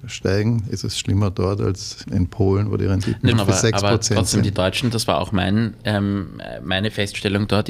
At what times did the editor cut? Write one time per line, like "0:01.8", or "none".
0:02.0
0:03.3